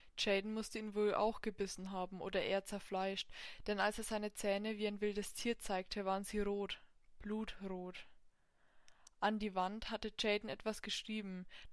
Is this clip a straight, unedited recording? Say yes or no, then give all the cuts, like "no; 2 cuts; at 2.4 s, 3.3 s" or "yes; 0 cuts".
yes; 0 cuts